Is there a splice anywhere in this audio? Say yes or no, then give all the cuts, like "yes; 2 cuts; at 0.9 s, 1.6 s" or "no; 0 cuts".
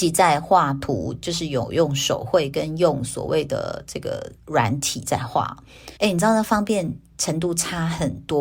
yes; 1 cut; at 6.0 s